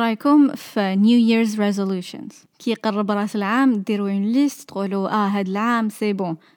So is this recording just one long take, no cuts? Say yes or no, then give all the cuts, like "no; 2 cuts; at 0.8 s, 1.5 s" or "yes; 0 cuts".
yes; 0 cuts